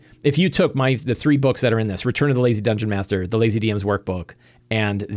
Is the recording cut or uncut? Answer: uncut